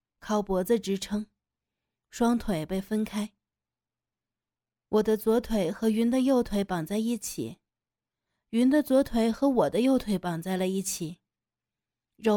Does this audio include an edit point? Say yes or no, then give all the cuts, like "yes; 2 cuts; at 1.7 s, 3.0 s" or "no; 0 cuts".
no; 0 cuts